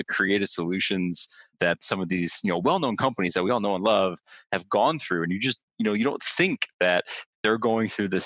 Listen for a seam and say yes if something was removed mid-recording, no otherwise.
yes